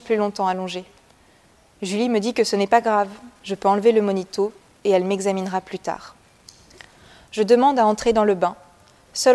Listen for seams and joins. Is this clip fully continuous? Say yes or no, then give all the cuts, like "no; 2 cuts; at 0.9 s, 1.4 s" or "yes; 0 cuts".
yes; 0 cuts